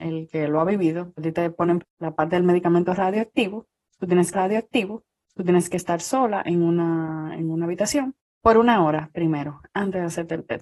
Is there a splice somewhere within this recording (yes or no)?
yes